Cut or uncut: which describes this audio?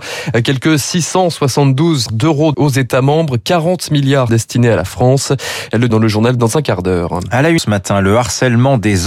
cut